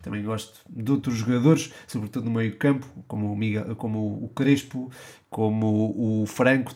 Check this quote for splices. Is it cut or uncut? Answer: uncut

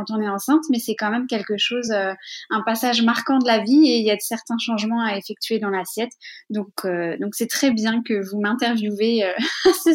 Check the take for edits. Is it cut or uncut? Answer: uncut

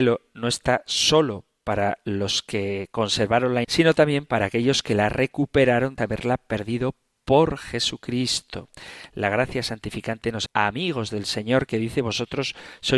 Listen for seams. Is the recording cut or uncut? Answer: cut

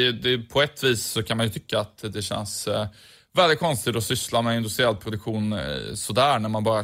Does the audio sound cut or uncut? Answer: uncut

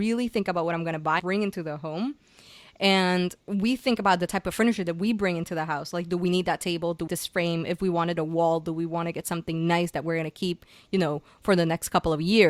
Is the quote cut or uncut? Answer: cut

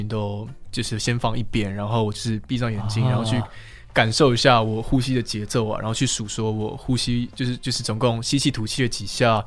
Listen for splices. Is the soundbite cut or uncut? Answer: uncut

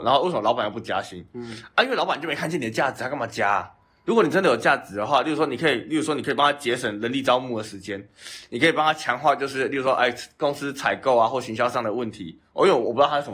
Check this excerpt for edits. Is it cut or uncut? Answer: uncut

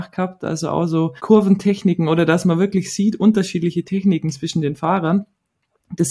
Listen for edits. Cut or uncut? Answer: cut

